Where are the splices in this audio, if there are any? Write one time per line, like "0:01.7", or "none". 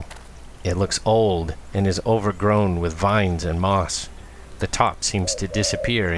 none